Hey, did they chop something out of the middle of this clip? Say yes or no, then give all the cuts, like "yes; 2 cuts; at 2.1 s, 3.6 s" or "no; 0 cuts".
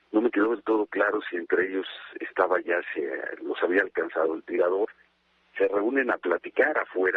no; 0 cuts